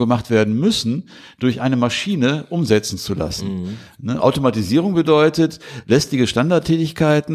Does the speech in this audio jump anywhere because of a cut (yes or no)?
no